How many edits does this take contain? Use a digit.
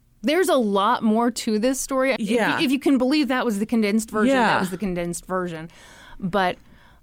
1